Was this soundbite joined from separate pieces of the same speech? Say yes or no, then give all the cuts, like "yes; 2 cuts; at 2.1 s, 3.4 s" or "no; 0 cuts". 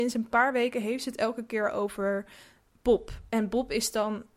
no; 0 cuts